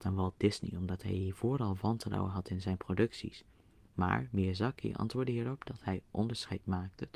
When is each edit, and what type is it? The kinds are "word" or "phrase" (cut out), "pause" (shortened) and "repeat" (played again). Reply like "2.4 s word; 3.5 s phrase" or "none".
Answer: none